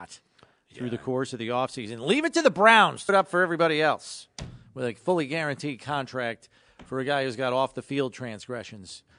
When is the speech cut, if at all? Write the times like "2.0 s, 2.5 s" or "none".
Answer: 3.1 s

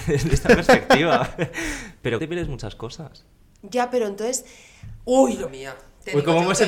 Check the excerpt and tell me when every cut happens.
2.2 s, 5.5 s

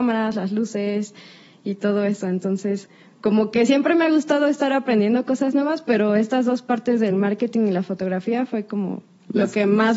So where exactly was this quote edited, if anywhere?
none

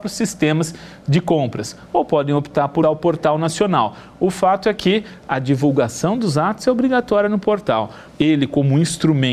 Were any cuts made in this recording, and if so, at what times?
2.8 s, 8.1 s

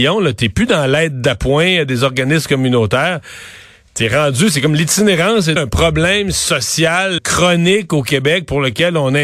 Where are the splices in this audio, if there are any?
5.6 s, 7.2 s

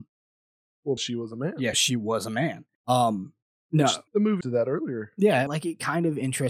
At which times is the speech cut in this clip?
1.0 s, 1.7 s, 2.7 s, 4.1 s, 4.4 s, 5.5 s

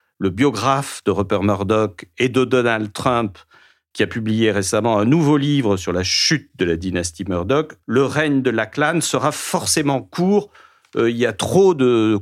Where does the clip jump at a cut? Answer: 7.8 s

